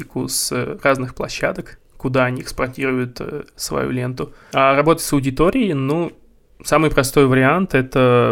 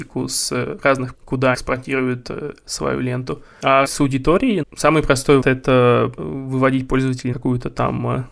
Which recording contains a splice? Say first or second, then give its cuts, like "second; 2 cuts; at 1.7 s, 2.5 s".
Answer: second; 7 cuts; at 1.1 s, 1.5 s, 3.8 s, 4.6 s, 5.4 s, 6.2 s, 7.3 s